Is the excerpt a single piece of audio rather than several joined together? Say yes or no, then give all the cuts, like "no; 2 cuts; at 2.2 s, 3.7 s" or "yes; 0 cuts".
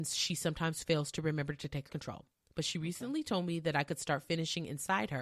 no; 1 cut; at 1.9 s